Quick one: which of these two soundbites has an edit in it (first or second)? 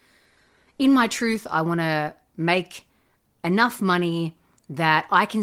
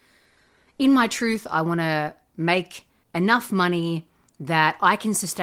second